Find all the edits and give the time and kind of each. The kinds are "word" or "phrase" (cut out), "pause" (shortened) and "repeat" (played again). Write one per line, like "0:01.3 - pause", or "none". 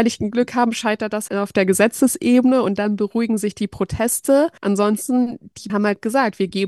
0:01.3 - word
0:04.6 - pause
0:05.7 - word